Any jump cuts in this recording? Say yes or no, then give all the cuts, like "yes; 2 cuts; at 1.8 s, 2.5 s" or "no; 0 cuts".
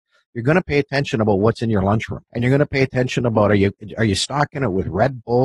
yes; 1 cut; at 2.3 s